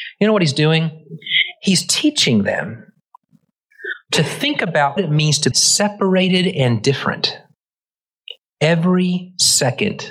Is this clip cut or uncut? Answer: cut